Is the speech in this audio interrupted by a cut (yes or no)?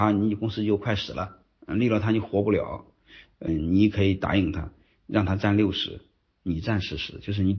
yes